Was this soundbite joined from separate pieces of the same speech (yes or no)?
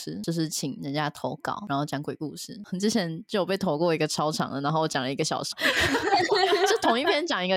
yes